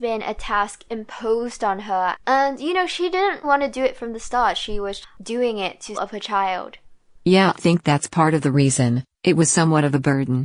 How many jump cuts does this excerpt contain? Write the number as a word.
five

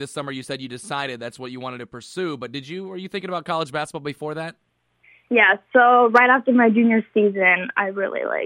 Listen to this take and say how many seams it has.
zero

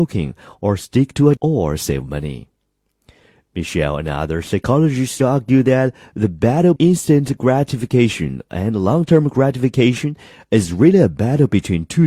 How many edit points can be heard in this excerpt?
two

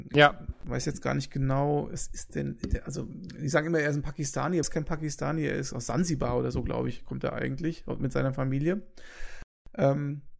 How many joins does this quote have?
one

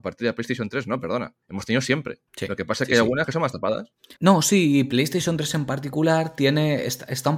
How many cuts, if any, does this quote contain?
three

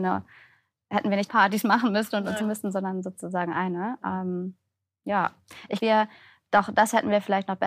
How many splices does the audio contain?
three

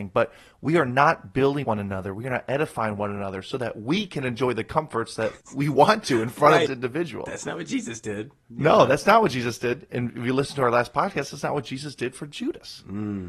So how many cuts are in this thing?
three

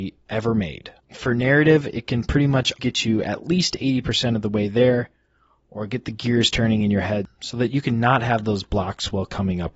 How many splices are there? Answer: one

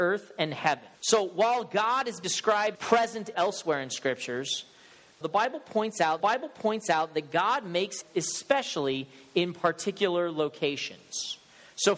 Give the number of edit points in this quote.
seven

